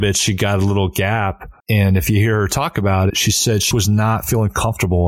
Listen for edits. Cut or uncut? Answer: cut